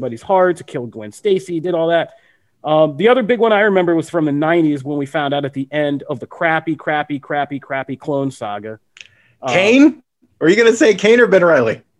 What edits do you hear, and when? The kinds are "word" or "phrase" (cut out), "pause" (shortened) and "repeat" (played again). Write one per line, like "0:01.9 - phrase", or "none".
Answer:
none